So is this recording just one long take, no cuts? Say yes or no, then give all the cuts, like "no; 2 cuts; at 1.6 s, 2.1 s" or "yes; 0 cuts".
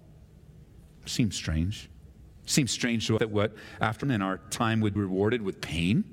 no; 3 cuts; at 3.2 s, 4.0 s, 5.0 s